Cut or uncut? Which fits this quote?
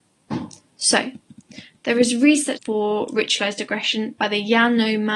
cut